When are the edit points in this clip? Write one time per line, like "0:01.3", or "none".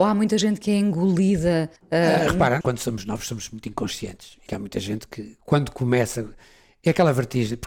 0:01.8
0:02.6
0:04.5